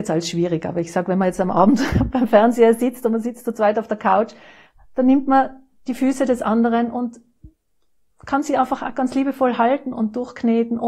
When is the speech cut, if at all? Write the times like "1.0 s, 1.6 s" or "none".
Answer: none